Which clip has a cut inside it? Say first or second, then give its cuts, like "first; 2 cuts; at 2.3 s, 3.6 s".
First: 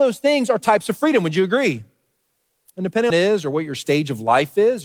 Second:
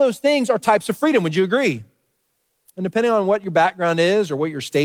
first; 1 cut; at 3.1 s